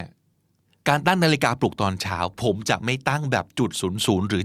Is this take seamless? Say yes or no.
yes